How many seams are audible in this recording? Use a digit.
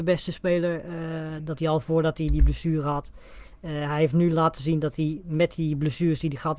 1